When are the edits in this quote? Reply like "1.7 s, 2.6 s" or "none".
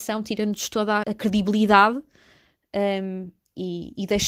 1.0 s